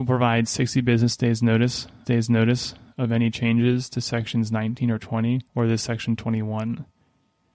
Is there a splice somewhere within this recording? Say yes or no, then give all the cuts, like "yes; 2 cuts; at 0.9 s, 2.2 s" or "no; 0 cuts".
yes; 2 cuts; at 2.0 s, 5.5 s